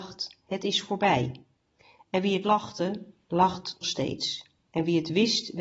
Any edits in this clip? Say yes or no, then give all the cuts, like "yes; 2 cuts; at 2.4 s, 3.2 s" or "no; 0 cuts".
yes; 3 cuts; at 1.5 s, 2.4 s, 3.8 s